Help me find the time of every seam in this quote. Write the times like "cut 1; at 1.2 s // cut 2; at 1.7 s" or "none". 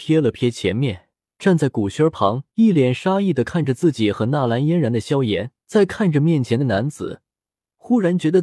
cut 1; at 1.2 s // cut 2; at 2.5 s // cut 3; at 5.6 s